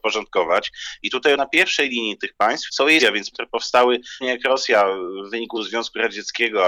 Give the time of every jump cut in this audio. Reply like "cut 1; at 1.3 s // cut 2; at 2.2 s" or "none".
cut 1; at 1.4 s // cut 2; at 2.7 s // cut 3; at 3.0 s // cut 4; at 3.3 s // cut 5; at 4.2 s // cut 6; at 5.5 s